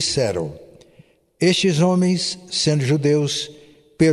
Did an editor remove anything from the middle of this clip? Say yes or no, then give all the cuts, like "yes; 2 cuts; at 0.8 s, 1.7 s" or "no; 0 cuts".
no; 0 cuts